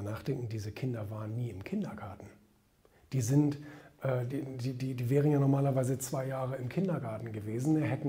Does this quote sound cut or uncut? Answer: uncut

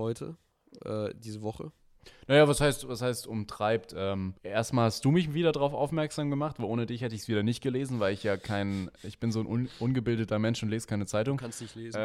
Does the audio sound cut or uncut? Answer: cut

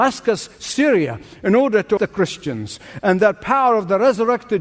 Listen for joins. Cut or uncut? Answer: cut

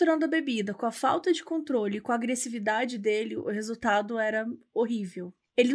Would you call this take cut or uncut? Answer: uncut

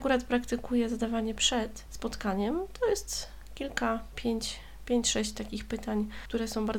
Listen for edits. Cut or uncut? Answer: cut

